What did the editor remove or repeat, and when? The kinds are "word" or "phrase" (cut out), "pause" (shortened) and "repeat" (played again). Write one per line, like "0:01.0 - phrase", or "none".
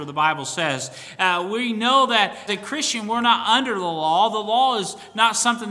0:02.5 - word